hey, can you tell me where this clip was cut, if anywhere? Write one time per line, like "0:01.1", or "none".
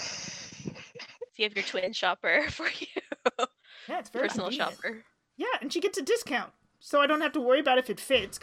none